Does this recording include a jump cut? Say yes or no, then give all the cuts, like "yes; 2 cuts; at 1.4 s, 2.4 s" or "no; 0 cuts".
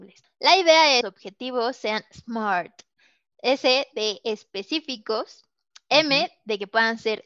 yes; 1 cut; at 1.0 s